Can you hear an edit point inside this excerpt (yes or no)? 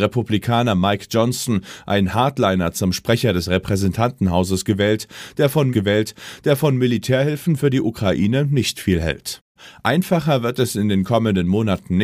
yes